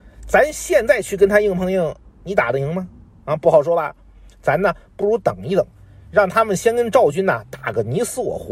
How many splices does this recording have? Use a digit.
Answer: 0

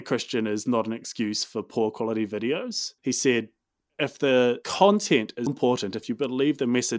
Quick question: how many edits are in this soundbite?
3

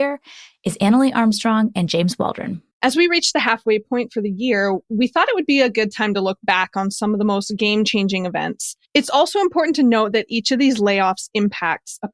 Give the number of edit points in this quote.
1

